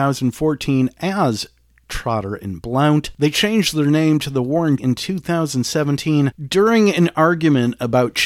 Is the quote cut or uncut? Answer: cut